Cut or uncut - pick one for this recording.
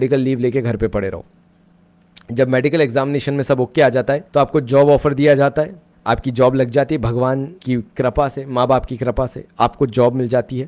cut